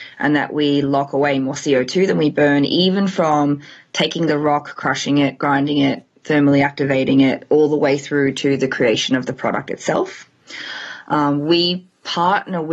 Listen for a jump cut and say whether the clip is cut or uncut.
uncut